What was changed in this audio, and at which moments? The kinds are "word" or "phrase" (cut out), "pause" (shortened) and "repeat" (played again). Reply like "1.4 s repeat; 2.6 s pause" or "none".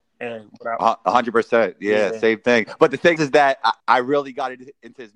3.2 s word; 3.8 s pause